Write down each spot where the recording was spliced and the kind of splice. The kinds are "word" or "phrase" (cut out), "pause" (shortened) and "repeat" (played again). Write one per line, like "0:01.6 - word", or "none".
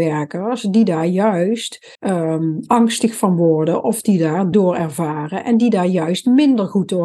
0:01.9 - pause
0:04.5 - word